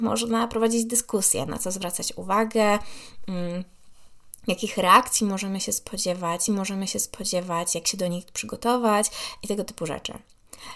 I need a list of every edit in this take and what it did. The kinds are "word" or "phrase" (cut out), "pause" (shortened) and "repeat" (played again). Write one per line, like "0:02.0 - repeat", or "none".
0:06.5 - repeat